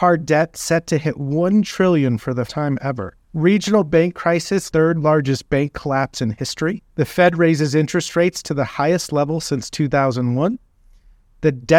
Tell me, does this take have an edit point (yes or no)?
yes